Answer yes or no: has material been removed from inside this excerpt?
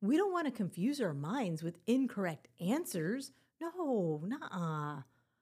no